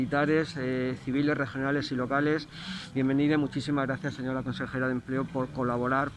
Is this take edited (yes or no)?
yes